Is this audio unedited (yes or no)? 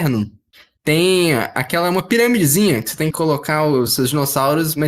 no